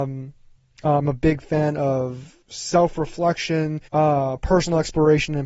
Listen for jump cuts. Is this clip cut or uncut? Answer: cut